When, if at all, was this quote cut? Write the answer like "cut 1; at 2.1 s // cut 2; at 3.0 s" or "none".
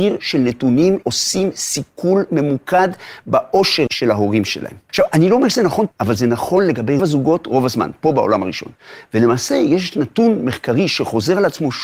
cut 1; at 1.0 s // cut 2; at 3.9 s // cut 3; at 4.9 s // cut 4; at 5.9 s // cut 5; at 7.0 s